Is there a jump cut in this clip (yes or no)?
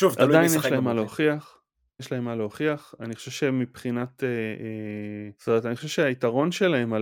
yes